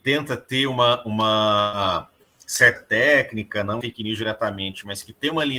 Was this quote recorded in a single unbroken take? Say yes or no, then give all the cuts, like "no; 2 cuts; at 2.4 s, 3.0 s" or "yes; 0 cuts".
no; 2 cuts; at 2.8 s, 3.8 s